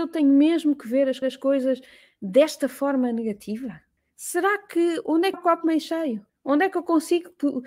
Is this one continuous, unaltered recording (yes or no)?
no